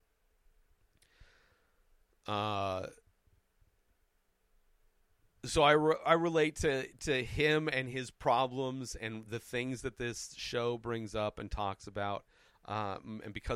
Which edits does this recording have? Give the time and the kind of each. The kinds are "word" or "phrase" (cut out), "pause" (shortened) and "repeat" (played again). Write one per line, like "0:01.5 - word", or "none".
none